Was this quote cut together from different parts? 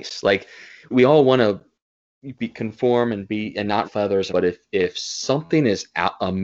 yes; 3 cuts; at 0.9 s, 3.8 s, 4.3 s

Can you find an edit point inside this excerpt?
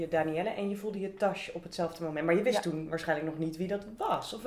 no; 0 cuts

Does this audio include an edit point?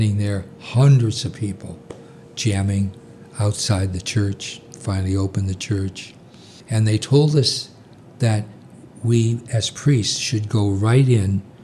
no; 0 cuts

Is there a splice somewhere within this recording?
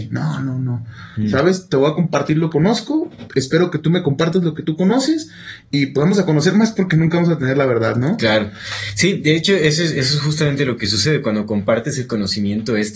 yes; 1 cut; at 2.5 s

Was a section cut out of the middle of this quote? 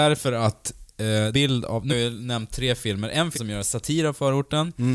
yes; 3 cuts; at 1.3 s, 1.9 s, 3.3 s

